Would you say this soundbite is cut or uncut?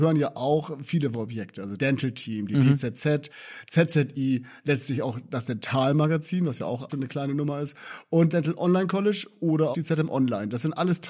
cut